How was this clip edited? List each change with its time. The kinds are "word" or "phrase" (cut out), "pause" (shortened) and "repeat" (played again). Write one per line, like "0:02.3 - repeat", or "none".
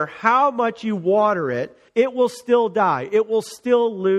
0:01.9 - pause

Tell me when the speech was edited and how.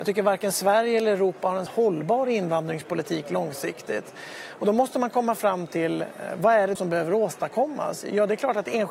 0:01.7 - word
0:06.8 - word

